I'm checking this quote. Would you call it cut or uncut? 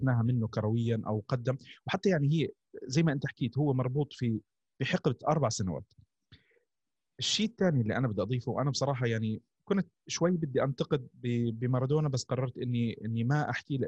uncut